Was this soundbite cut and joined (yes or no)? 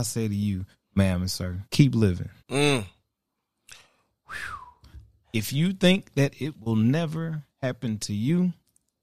yes